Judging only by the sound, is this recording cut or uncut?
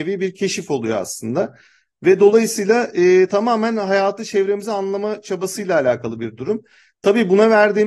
uncut